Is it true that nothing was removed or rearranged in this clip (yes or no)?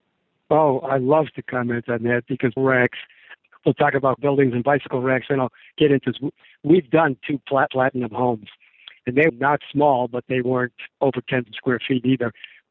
no